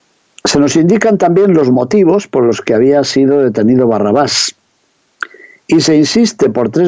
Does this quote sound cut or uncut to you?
uncut